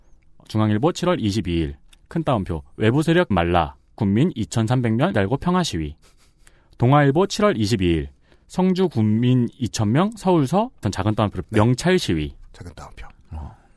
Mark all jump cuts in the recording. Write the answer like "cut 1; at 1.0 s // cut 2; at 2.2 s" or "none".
cut 1; at 3.3 s // cut 2; at 4.0 s // cut 3; at 5.1 s // cut 4; at 10.8 s // cut 5; at 11.4 s